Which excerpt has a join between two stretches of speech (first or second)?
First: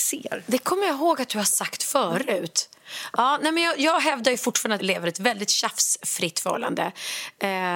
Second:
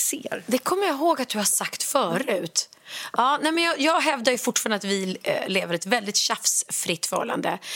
first